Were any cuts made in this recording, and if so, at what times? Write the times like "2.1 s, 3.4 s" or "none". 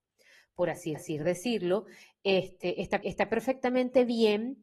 1.0 s, 3.0 s